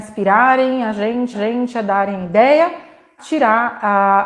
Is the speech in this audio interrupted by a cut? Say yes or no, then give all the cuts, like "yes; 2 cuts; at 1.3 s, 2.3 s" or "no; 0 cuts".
yes; 2 cuts; at 1.3 s, 3.2 s